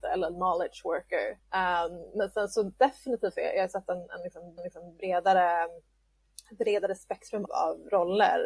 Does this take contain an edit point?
yes; 3 cuts; at 1.4 s, 4.6 s, 7.5 s

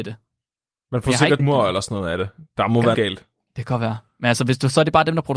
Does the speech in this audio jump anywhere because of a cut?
yes; 2 cuts; at 1.4 s, 2.9 s

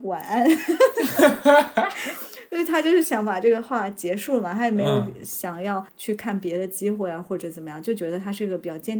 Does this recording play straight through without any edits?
no; 1 cut; at 5.9 s

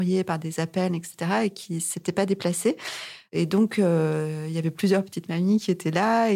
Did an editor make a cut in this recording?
no; 0 cuts

